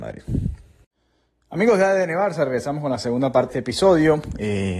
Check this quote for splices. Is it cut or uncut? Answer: cut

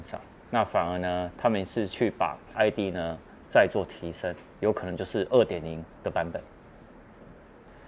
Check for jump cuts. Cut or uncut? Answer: cut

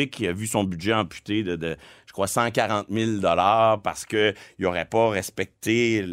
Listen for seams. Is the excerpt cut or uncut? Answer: uncut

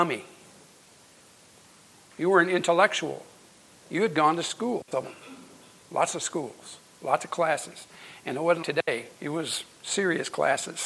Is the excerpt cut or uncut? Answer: cut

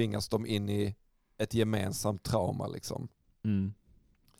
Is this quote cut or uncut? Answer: uncut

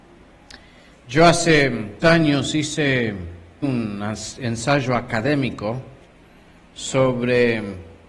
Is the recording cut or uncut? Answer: cut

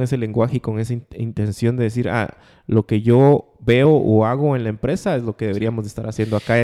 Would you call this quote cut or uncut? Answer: uncut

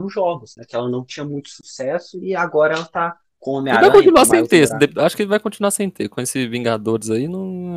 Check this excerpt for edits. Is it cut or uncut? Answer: uncut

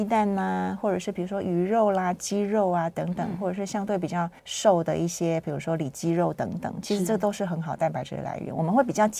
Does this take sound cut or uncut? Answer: cut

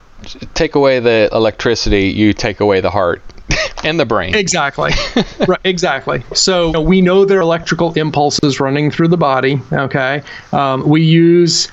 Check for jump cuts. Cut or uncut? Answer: cut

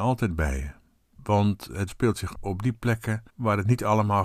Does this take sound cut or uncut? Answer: cut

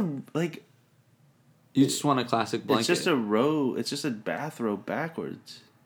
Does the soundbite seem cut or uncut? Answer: uncut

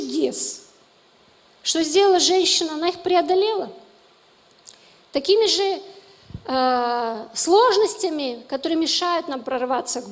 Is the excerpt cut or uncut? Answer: uncut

